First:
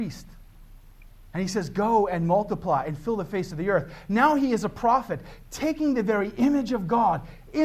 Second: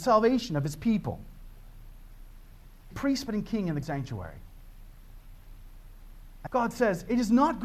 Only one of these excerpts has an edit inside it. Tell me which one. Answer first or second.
second